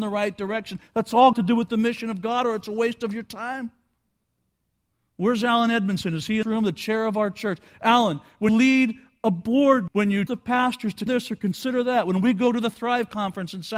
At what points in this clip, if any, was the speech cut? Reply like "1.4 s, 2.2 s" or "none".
1.3 s, 6.4 s, 8.5 s, 9.9 s, 10.3 s, 11.1 s